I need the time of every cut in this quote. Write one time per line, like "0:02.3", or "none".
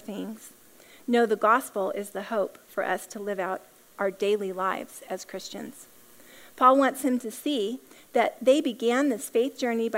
none